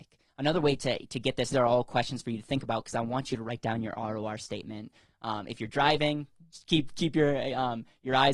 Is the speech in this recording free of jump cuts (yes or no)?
no